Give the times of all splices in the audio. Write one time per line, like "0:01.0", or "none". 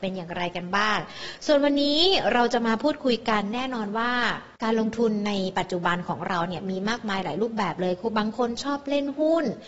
0:04.6